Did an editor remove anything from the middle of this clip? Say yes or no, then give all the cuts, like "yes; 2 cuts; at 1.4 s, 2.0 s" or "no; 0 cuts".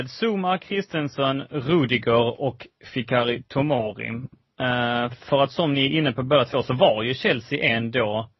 no; 0 cuts